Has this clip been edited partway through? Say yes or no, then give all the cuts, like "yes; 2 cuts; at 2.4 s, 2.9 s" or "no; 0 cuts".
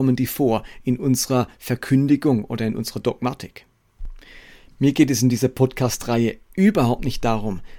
no; 0 cuts